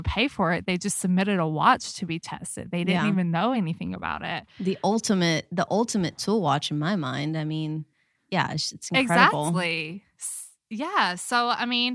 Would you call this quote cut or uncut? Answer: uncut